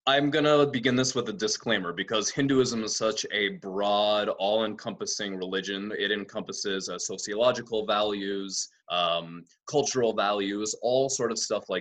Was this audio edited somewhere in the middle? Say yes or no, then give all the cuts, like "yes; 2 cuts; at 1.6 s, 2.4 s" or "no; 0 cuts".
yes; 1 cut; at 8.8 s